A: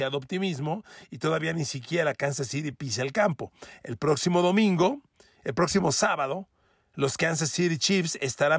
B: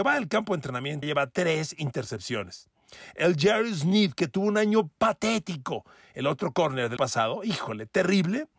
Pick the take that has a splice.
B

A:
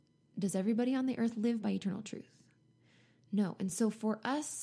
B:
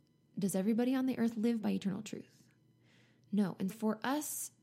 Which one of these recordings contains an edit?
B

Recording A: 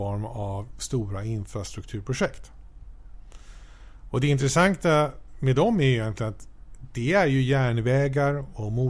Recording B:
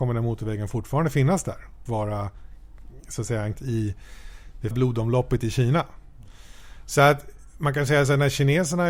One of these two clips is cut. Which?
B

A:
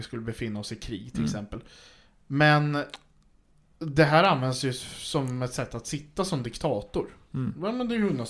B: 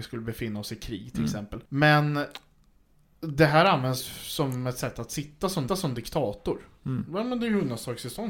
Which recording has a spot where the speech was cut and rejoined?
B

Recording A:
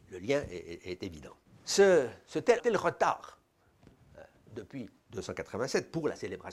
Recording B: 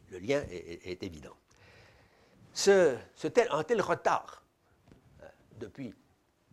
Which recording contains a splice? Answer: A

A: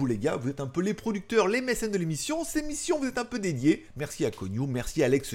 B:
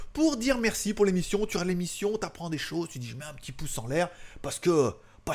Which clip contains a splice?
A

